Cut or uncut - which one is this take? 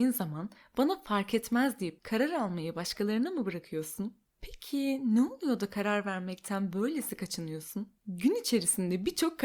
cut